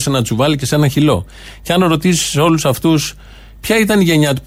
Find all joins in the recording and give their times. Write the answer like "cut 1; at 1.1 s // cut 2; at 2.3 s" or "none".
none